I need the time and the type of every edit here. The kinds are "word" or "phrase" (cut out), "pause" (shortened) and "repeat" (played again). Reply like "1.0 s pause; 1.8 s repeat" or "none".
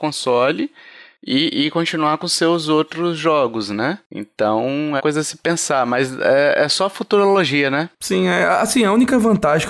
5.0 s word